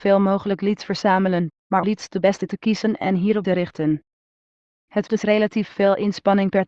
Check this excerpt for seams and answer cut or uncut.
cut